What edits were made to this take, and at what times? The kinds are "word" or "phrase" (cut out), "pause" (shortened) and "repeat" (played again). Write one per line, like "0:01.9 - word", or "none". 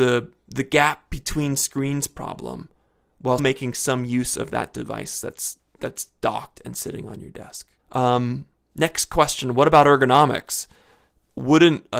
0:03.4 - word
0:07.8 - pause